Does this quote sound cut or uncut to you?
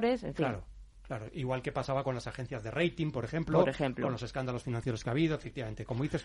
uncut